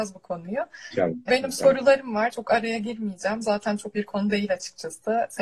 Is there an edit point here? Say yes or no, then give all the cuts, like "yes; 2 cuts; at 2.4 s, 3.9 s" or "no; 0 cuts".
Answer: yes; 2 cuts; at 1.3 s, 3.9 s